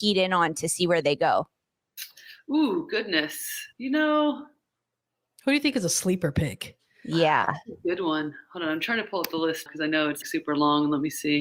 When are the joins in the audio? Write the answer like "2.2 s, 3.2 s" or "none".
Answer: 3.7 s, 9.7 s, 10.2 s

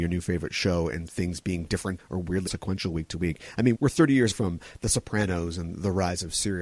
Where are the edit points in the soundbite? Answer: 1.1 s, 2.0 s, 2.5 s, 3.7 s, 4.3 s

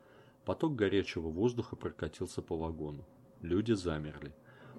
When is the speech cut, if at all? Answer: none

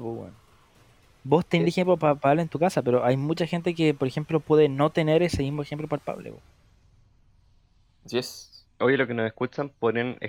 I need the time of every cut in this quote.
none

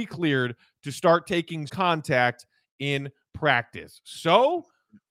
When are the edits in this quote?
1.7 s

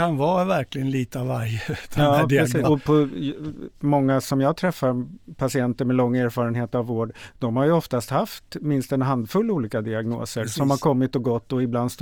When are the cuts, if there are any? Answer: 2.6 s

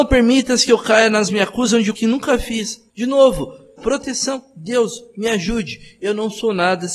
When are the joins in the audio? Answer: 1.3 s, 1.9 s, 2.9 s, 3.8 s

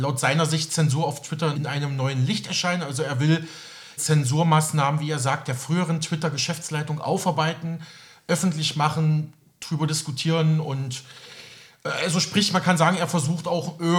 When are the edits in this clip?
1.5 s, 4.0 s

